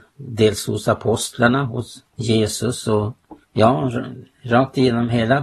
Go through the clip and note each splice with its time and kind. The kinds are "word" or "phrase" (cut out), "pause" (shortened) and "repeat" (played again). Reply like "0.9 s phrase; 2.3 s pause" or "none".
2.1 s pause; 3.4 s pause